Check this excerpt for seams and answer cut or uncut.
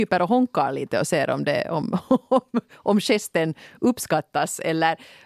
uncut